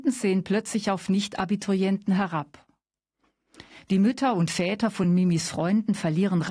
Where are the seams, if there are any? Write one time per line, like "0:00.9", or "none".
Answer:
none